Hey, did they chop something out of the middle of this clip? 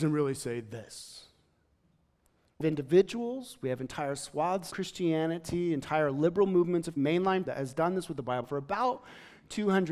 yes; 5 cuts; at 2.6 s, 4.7 s, 7.0 s, 7.5 s, 8.4 s

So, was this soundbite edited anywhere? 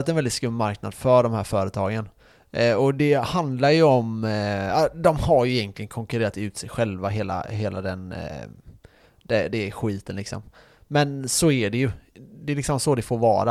no; 0 cuts

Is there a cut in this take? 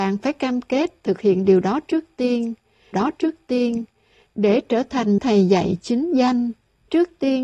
yes; 2 cuts; at 2.9 s, 5.2 s

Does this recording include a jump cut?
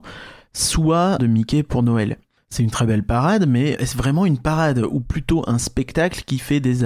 yes; 3 cuts; at 1.2 s, 2.7 s, 3.8 s

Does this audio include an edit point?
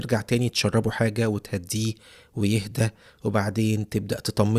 no; 0 cuts

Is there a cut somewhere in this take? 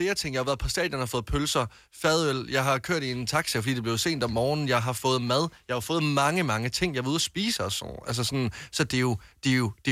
no; 0 cuts

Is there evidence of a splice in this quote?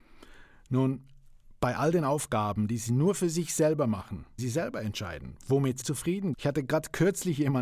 yes; 3 cuts; at 4.4 s, 5.8 s, 6.3 s

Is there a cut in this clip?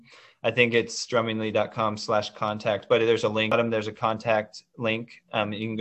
no; 0 cuts

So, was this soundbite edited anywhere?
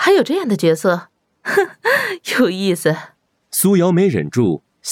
yes; 1 cut; at 3.3 s

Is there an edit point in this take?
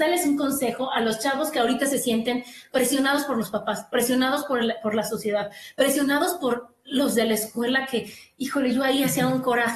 no; 0 cuts

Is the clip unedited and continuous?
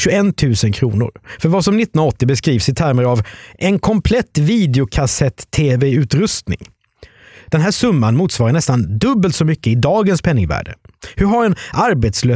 yes; 0 cuts

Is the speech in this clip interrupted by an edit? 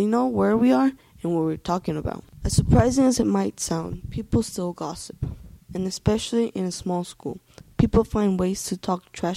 no; 0 cuts

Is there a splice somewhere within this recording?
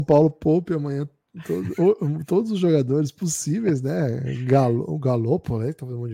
no; 0 cuts

